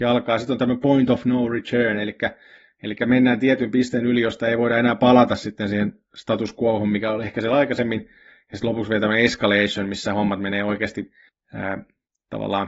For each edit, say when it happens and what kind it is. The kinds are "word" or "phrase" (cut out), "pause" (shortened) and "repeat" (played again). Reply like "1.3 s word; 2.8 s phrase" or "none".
none